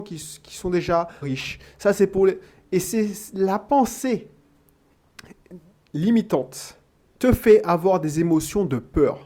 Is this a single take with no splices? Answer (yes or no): no